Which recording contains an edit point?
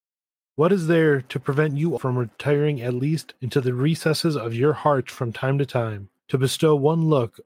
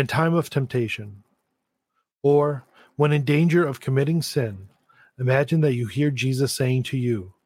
first; 3 cuts; at 2.0 s, 3.4 s, 6.2 s

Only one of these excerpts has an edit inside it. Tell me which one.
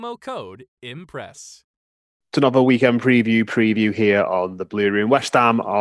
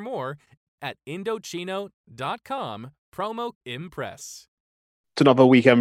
second; 1 cut; at 3.5 s

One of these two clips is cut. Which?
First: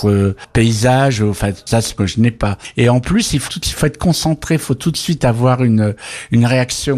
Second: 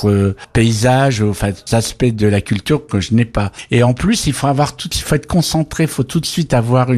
first; 2 cuts; at 2.0 s, 3.5 s

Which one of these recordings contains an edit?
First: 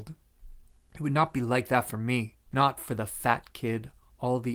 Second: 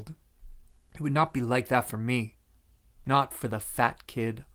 first; 1 cut; at 2.5 s

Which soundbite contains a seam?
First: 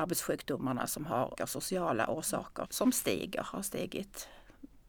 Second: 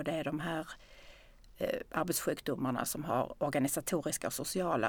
first; 2 cuts; at 1.4 s, 2.7 s

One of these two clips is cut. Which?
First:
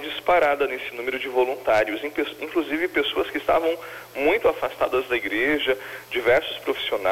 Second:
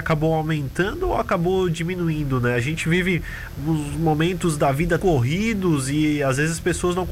second; 1 cut; at 5.0 s

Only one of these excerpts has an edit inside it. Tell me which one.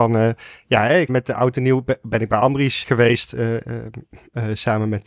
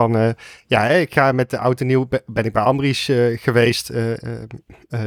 first; 2 cuts; at 1.1 s, 2.8 s

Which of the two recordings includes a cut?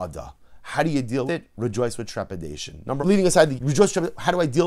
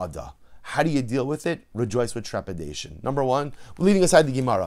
first; 3 cuts; at 1.3 s, 3.0 s, 3.5 s

